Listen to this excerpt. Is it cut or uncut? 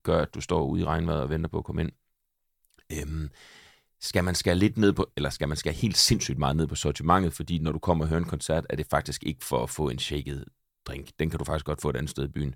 uncut